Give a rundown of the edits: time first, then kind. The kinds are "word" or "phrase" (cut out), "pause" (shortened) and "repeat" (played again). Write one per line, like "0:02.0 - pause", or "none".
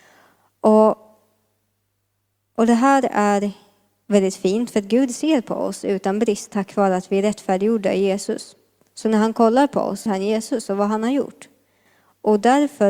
0:10.1 - word

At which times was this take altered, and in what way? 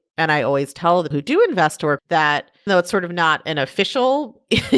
0:01.1 - word
0:02.0 - phrase
0:02.7 - word

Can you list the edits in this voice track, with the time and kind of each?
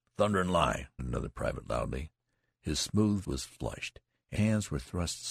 0:01.0 - word
0:03.2 - word
0:04.4 - word

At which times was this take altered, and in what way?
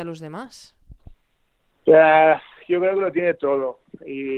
none

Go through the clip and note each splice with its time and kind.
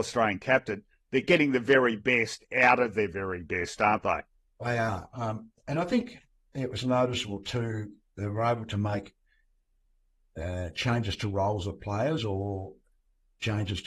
none

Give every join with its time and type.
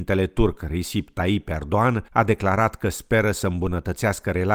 0:02.1 - pause

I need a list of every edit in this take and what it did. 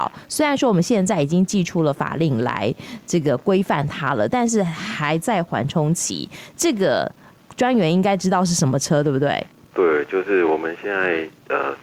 0:09.7 - word

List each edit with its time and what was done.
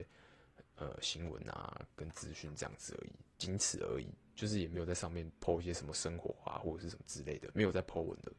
0:03.3 - pause

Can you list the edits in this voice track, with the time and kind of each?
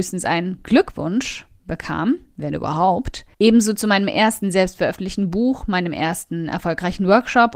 0:03.3 - pause

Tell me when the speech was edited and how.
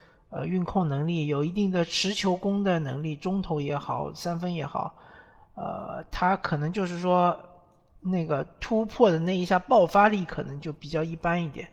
none

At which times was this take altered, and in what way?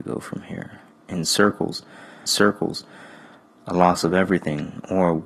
0:02.3 - repeat

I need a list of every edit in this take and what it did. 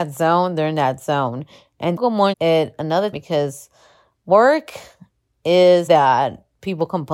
0:02.0 - word
0:02.3 - word
0:03.1 - word
0:05.9 - word

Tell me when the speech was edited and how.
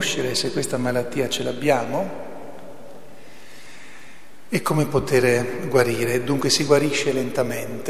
none

